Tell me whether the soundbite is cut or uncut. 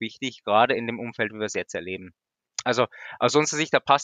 uncut